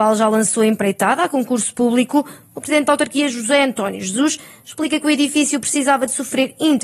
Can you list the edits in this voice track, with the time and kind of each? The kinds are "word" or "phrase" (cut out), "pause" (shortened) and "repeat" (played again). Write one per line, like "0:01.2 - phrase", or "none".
none